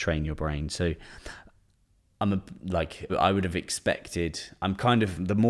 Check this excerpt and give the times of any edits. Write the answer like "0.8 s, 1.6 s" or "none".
3.1 s